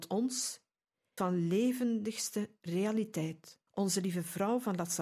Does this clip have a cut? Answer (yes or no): yes